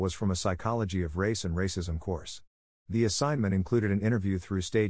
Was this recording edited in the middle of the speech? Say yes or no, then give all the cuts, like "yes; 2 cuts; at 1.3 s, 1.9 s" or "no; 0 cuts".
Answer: no; 0 cuts